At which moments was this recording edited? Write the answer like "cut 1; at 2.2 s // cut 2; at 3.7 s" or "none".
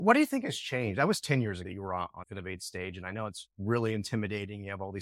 cut 1; at 1.6 s // cut 2; at 2.2 s